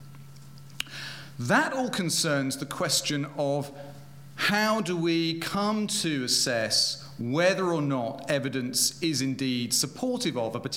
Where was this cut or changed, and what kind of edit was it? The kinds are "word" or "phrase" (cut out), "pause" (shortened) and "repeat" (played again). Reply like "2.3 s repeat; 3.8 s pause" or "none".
none